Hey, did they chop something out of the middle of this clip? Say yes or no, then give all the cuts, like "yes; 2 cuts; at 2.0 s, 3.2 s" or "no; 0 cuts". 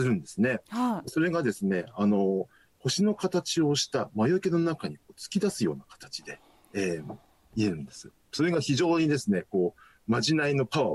no; 0 cuts